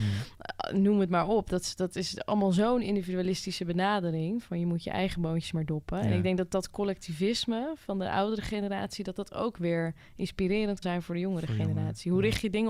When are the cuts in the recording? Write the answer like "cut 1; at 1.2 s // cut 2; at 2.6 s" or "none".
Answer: cut 1; at 10.8 s

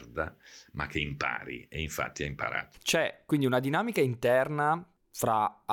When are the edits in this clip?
none

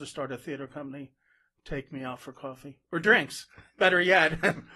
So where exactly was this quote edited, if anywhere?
none

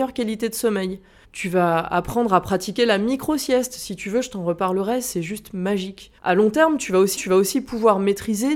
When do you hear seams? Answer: cut 1; at 1.2 s // cut 2; at 6.2 s // cut 3; at 7.2 s

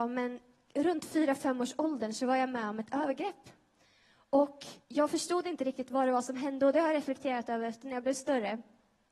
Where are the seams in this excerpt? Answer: cut 1; at 4.8 s

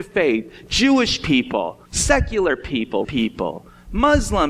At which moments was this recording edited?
cut 1; at 1.9 s // cut 2; at 3.0 s

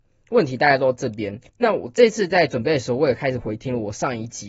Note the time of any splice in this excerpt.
cut 1; at 1.5 s

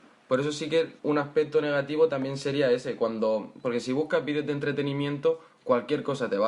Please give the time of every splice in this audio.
cut 1; at 1.0 s

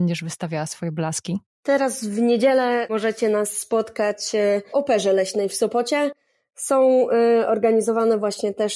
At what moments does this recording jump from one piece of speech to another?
cut 1; at 4.7 s

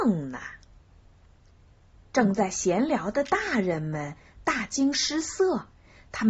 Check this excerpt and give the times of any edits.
none

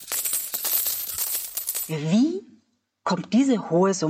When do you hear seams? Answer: none

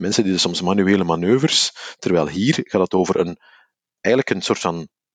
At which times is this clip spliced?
none

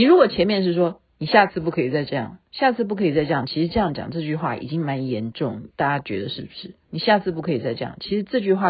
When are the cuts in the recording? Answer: cut 1; at 2.5 s

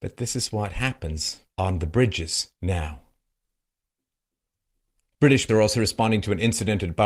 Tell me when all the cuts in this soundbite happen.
cut 1; at 1.5 s // cut 2; at 2.6 s // cut 3; at 5.5 s

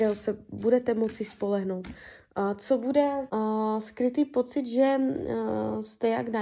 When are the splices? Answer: cut 1; at 3.3 s

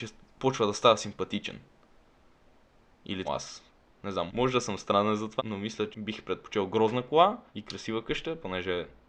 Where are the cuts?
cut 1; at 3.2 s // cut 2; at 4.3 s // cut 3; at 5.4 s // cut 4; at 5.9 s // cut 5; at 7.5 s

